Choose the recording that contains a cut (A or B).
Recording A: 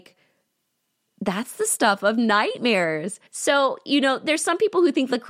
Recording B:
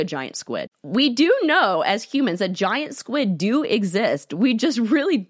A